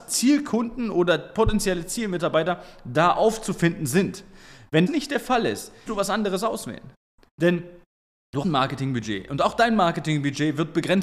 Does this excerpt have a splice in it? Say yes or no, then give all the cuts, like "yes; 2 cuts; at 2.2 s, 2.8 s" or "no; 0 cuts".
yes; 3 cuts; at 4.9 s, 5.9 s, 8.4 s